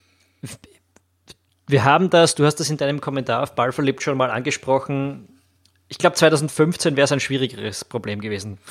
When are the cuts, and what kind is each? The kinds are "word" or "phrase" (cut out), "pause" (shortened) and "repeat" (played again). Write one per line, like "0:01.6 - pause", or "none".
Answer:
none